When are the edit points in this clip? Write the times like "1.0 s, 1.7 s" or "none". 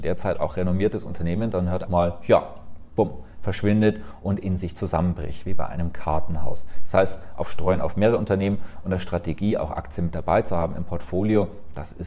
1.9 s